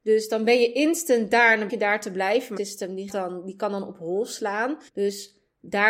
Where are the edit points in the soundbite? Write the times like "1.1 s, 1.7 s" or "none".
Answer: 1.7 s, 2.6 s, 3.1 s, 4.9 s

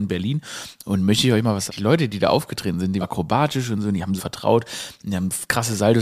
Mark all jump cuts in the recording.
1.7 s, 3.0 s, 4.2 s

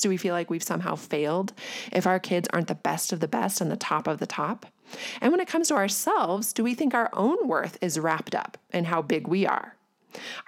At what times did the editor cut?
none

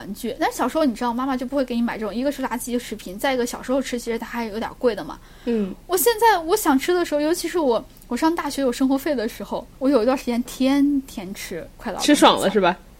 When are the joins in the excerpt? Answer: 9.7 s

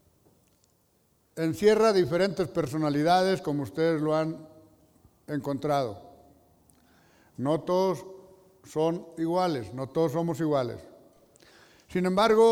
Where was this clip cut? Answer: none

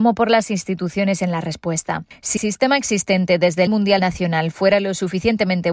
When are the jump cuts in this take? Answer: 1.2 s, 2.4 s, 3.7 s, 4.0 s

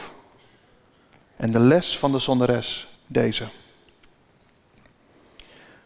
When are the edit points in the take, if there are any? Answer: 3.0 s

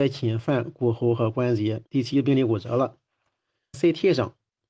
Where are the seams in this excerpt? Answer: 1.9 s, 3.7 s

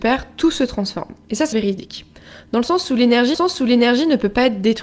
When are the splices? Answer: 1.5 s, 3.3 s

